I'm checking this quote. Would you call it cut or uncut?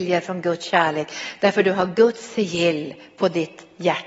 uncut